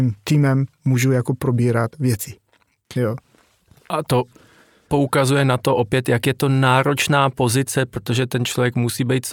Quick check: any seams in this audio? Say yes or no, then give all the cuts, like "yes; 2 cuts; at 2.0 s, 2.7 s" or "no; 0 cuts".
no; 0 cuts